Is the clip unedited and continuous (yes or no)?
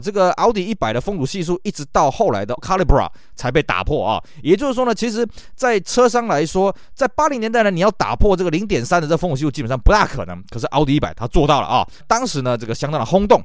no